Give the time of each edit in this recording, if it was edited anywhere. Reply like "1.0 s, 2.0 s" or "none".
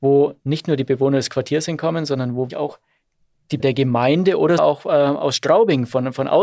2.5 s, 3.6 s, 4.6 s